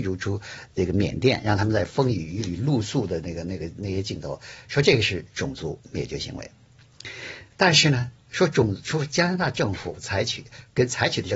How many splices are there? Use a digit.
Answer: 2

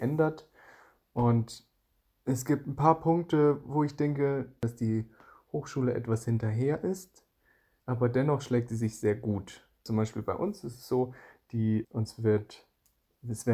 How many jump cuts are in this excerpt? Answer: 2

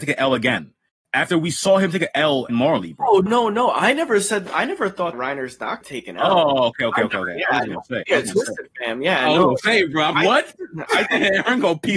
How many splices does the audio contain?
7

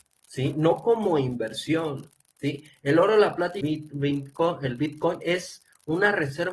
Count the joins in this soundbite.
1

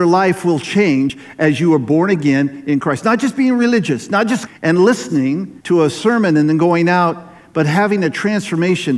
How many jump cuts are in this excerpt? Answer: 2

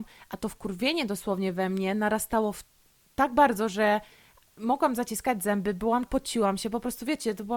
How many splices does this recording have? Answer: 1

